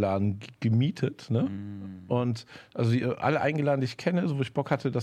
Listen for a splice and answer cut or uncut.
uncut